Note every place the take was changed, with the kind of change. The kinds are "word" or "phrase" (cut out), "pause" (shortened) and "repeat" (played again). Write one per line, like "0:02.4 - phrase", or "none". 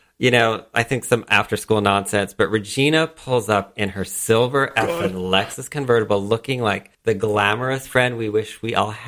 0:06.9 - pause